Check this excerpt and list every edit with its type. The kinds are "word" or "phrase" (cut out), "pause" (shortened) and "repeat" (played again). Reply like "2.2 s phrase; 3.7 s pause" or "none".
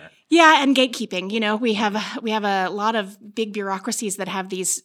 none